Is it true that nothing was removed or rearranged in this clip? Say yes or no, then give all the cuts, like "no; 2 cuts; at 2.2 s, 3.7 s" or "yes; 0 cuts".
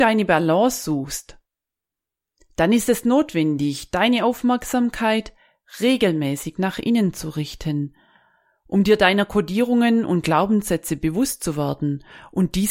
yes; 0 cuts